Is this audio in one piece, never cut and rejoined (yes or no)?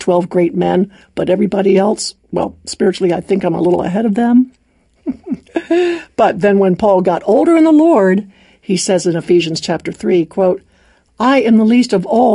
yes